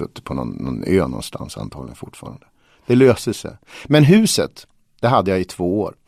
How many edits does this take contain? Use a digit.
0